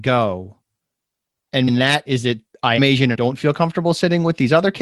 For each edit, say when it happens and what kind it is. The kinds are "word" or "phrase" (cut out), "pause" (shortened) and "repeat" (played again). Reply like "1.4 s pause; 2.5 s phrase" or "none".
1.7 s word; 2.1 s word; 2.8 s word; 3.1 s word